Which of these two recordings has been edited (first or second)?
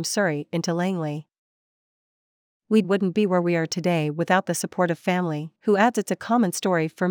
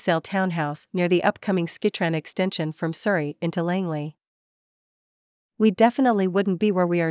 first